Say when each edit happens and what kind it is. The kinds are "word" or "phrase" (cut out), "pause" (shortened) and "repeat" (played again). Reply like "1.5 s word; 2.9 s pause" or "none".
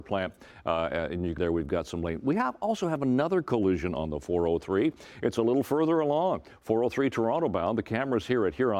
1.4 s phrase